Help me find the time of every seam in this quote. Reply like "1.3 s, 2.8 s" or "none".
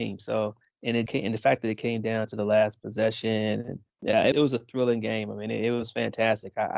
1.1 s, 3.9 s, 4.3 s